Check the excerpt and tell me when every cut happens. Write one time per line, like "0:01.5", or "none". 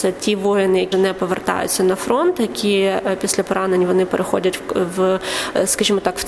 0:00.9